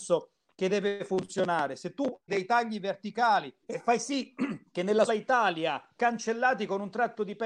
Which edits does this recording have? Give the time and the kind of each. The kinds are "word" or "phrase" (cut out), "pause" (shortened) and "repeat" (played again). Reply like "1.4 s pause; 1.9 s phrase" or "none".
2.3 s word; 3.6 s pause; 4.7 s pause; 5.1 s word; 6.0 s word